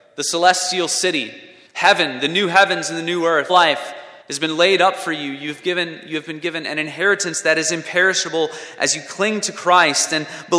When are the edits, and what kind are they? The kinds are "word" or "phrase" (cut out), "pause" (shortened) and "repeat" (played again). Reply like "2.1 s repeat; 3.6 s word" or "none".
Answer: 1.7 s pause; 3.5 s word; 4.2 s pause